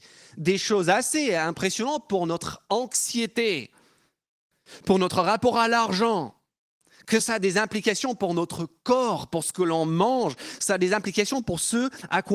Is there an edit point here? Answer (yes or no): no